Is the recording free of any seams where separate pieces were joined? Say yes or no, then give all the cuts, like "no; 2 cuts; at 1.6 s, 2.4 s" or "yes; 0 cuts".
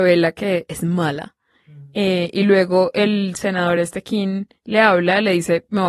yes; 0 cuts